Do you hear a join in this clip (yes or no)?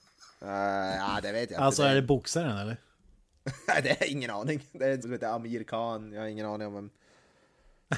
yes